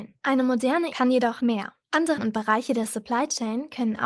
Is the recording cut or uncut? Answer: cut